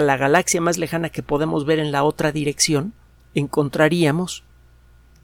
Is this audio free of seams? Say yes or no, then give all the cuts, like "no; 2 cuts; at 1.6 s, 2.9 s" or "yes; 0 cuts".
no; 1 cut; at 3.1 s